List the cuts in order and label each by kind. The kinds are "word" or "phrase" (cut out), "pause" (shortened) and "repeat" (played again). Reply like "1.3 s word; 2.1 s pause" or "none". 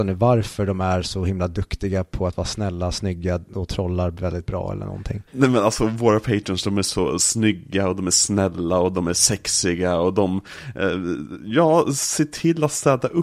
5.3 s pause

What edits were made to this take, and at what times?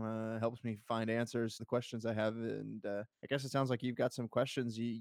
1.6 s word; 3.1 s pause

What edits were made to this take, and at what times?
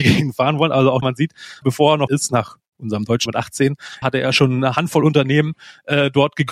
1.0 s word; 1.6 s word; 2.1 s word; 3.3 s word; 4.0 s word

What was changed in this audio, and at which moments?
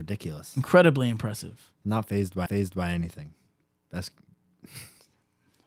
2.5 s repeat

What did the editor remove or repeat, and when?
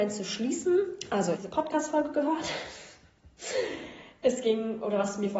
1.4 s phrase

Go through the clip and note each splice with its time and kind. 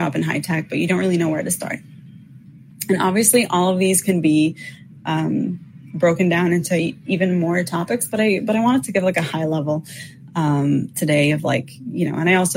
none

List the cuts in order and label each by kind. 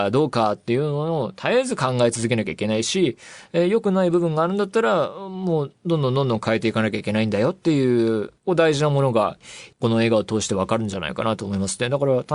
8.4 s pause

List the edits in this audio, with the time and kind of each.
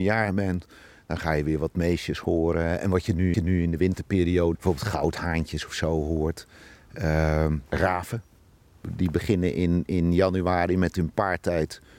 3.3 s repeat; 4.5 s word; 7.7 s pause

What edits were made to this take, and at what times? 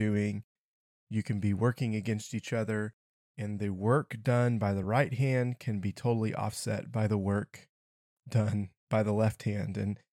none

